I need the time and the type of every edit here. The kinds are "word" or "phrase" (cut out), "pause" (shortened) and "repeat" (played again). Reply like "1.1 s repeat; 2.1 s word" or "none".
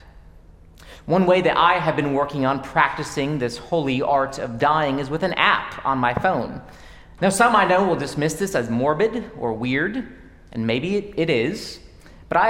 none